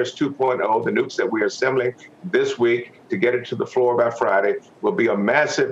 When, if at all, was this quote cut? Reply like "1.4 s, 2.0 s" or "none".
1.1 s, 3.1 s